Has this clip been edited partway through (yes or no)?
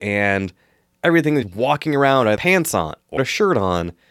yes